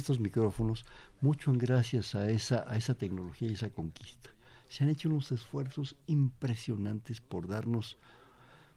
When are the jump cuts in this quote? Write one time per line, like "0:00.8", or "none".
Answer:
none